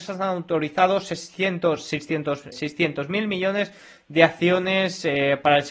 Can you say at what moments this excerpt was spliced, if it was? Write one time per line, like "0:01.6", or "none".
0:02.5